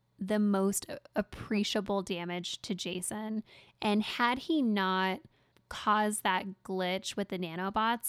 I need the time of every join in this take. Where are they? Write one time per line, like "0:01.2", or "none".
none